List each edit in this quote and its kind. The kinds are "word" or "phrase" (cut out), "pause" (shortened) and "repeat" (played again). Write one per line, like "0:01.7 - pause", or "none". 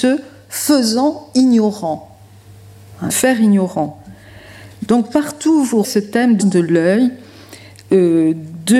0:03.1 - word
0:05.8 - word
0:06.4 - word